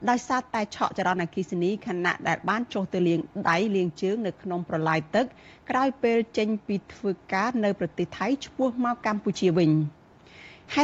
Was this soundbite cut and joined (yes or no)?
no